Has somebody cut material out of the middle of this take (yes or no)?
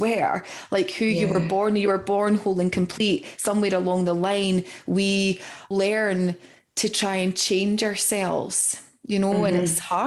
yes